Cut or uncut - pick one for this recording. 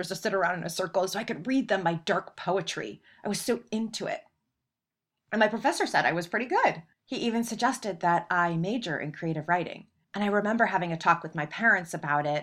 cut